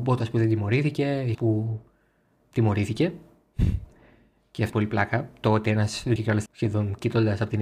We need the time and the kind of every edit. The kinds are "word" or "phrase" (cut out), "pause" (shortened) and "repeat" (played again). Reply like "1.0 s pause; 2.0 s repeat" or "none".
1.3 s word; 2.4 s word; 4.7 s word; 6.2 s word; 6.5 s word

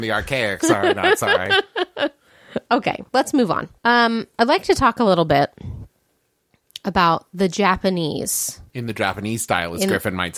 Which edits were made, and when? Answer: 3.1 s pause; 3.8 s pause; 8.7 s pause

